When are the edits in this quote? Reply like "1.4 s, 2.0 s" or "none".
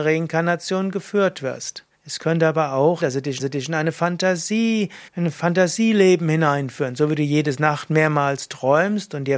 1.9 s, 3.0 s, 3.4 s, 5.1 s